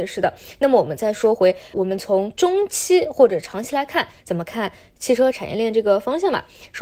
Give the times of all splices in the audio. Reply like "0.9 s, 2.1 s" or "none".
1.7 s